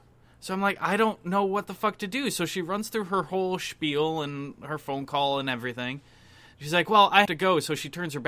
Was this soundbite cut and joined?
yes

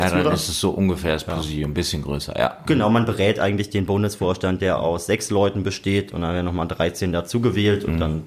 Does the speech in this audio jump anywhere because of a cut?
no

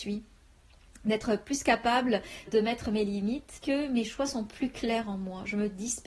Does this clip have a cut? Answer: yes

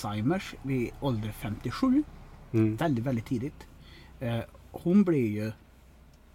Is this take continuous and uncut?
yes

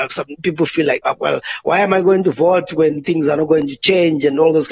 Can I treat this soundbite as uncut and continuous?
yes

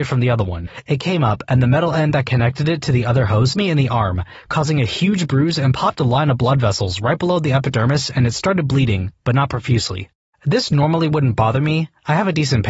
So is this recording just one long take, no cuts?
no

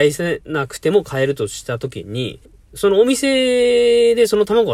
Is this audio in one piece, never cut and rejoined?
no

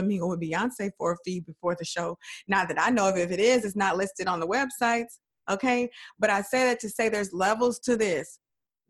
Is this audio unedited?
yes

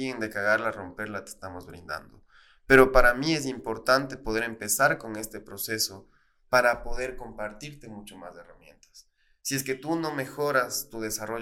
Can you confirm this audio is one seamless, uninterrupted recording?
yes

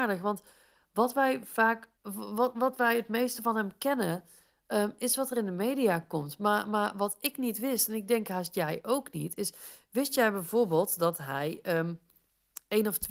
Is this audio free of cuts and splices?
no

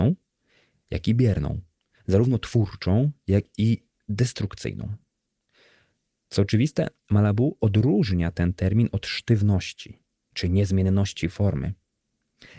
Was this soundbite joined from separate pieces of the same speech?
no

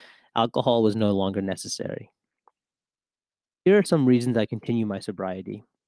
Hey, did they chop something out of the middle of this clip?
no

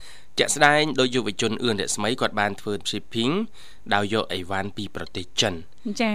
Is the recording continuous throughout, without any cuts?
no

